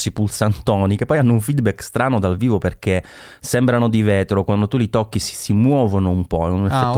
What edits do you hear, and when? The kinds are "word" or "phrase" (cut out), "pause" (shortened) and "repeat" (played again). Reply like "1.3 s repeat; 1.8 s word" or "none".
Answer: none

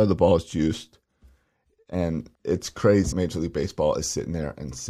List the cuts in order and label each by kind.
2.3 s pause; 3.1 s word

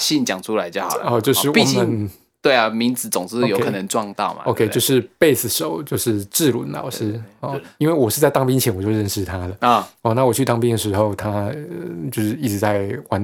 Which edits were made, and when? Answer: none

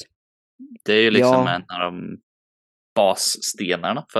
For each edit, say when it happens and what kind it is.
none

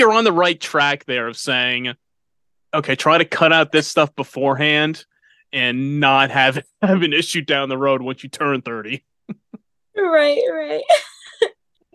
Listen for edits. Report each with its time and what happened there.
none

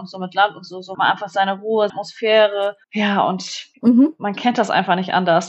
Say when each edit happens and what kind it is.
0.9 s word; 1.9 s word; 2.8 s pause; 3.7 s pause

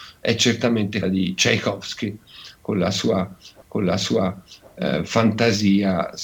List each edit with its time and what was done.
1.0 s word; 3.6 s repeat

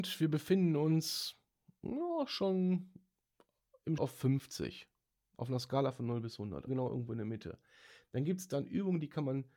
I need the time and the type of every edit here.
4.0 s word; 6.7 s word

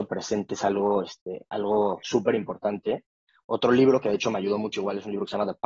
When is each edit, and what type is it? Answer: none

